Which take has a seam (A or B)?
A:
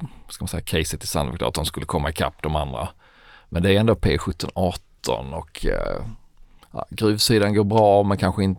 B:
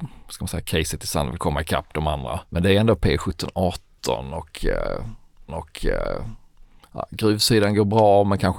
B